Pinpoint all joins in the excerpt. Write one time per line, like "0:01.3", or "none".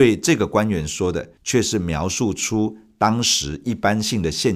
0:01.4